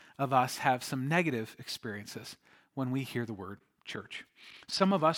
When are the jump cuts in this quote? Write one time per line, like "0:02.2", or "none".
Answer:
none